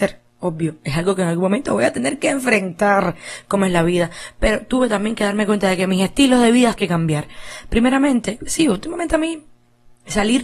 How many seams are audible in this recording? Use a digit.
1